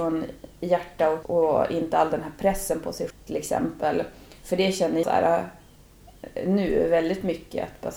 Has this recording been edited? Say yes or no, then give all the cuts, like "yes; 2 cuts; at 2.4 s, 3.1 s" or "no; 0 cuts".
yes; 3 cuts; at 1.2 s, 3.1 s, 5.0 s